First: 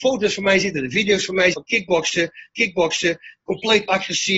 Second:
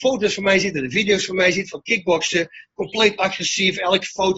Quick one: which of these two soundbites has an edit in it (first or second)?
first